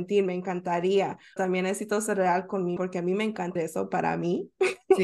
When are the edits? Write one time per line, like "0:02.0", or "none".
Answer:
0:01.4
0:02.8
0:03.6